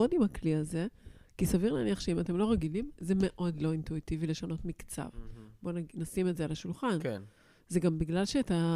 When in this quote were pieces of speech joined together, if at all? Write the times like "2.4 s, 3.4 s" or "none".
none